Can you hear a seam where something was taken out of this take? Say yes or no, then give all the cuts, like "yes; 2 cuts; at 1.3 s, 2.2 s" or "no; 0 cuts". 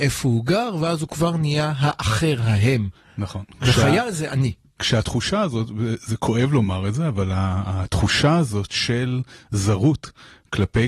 no; 0 cuts